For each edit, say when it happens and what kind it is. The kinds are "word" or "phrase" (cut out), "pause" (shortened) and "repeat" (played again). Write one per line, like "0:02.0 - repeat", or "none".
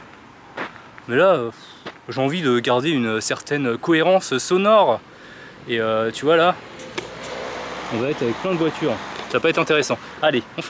none